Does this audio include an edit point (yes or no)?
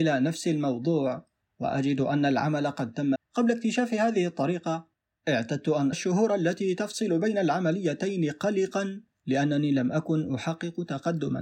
yes